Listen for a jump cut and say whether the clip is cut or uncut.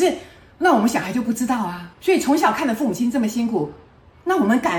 cut